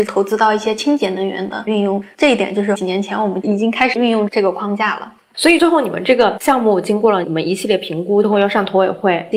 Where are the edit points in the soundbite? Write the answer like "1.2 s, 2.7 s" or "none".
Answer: 8.2 s